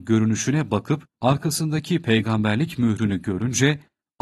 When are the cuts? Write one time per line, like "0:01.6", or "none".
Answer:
0:01.1